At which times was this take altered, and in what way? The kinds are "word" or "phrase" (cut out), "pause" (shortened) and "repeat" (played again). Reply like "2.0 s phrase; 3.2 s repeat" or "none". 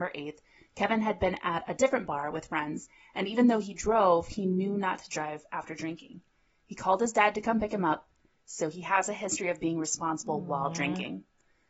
none

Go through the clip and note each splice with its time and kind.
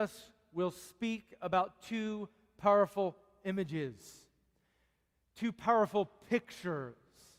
none

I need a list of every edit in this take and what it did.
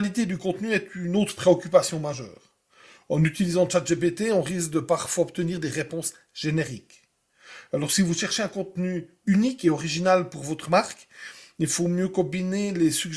none

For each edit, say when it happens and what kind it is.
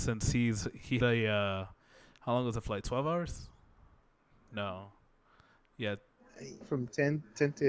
1.0 s word; 6.6 s word

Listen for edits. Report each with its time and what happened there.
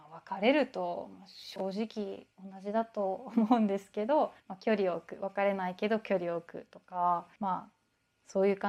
2.3 s pause; 4.4 s pause; 7.3 s pause

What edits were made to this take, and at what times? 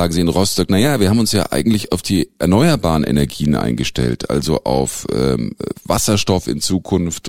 none

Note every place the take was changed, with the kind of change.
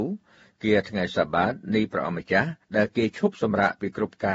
2.6 s pause

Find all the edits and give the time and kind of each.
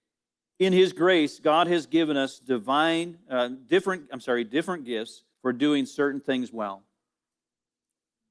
5.3 s pause

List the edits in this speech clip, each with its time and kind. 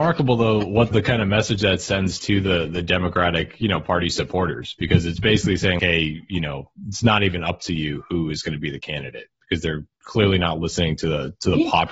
0.9 s word; 5.8 s word

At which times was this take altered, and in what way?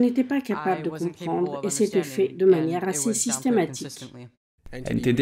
none

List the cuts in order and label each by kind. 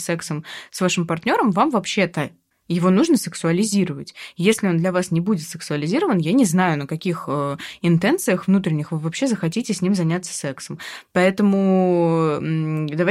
none

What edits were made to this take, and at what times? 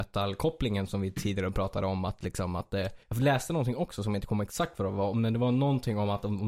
3.0 s pause

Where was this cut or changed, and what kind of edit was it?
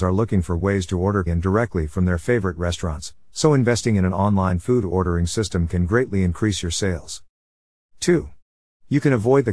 1.3 s word

